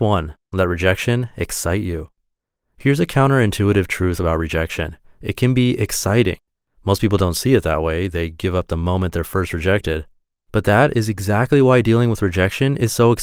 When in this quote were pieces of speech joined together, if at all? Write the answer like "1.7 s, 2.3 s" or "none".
none